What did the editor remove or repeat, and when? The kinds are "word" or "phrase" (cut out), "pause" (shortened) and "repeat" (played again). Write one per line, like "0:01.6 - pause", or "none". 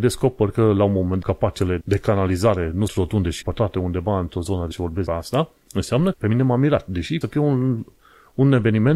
0:01.2 - word
0:01.8 - word
0:02.9 - word
0:03.4 - word
0:04.7 - word
0:05.1 - word
0:06.1 - word
0:07.2 - word